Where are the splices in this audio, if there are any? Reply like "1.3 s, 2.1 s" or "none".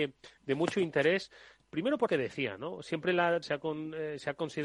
2.1 s, 3.4 s